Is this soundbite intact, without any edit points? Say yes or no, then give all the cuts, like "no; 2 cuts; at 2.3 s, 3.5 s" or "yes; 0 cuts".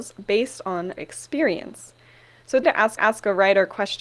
no; 3 cuts; at 1.0 s, 2.6 s, 3.0 s